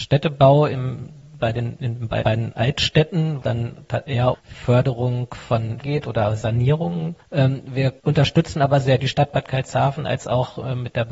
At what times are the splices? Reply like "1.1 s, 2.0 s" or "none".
2.2 s, 3.4 s, 4.3 s, 5.8 s, 7.2 s, 8.0 s, 9.0 s